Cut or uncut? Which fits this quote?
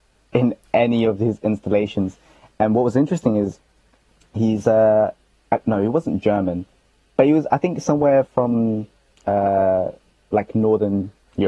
uncut